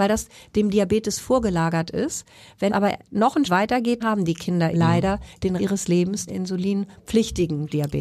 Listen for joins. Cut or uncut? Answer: cut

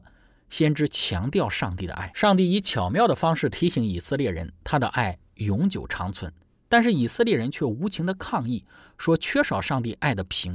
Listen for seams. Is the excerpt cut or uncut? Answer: uncut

